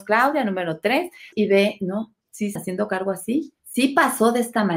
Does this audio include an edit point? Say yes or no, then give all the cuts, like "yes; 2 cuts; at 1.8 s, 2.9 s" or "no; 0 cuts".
yes; 3 cuts; at 1.3 s, 2.6 s, 3.6 s